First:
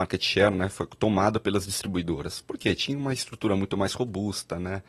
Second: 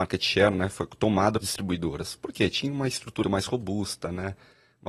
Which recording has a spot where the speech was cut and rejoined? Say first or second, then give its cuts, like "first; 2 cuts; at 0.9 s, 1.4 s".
second; 2 cuts; at 1.4 s, 3.2 s